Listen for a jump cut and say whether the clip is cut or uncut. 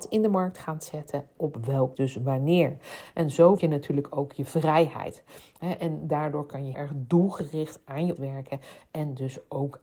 cut